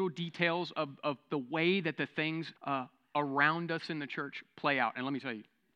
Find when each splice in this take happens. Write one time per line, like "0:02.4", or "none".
0:02.6